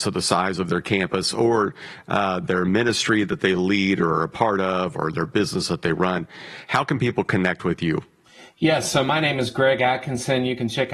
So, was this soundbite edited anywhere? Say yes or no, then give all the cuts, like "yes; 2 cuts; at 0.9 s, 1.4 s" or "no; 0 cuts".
no; 0 cuts